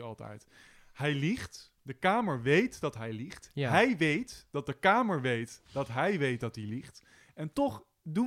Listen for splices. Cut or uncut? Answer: cut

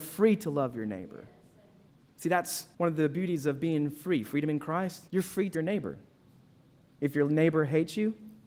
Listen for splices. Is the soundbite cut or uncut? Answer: cut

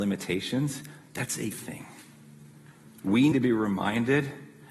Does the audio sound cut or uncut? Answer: cut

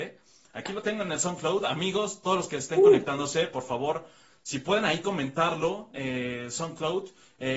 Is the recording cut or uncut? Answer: uncut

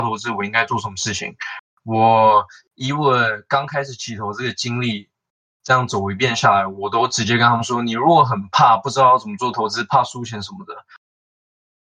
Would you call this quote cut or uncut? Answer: uncut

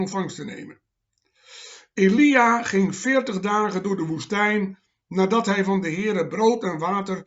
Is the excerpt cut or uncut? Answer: uncut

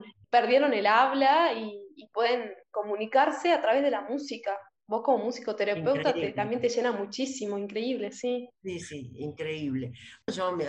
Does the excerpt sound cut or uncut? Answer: cut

